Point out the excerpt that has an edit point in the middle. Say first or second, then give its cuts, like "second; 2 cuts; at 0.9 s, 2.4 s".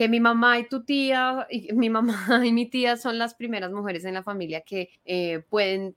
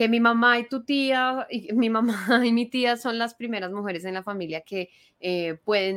first; 1 cut; at 4.9 s